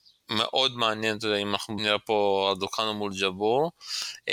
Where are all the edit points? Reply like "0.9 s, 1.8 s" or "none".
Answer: 1.8 s